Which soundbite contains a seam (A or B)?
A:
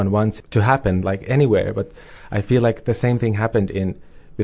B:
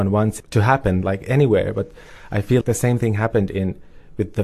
B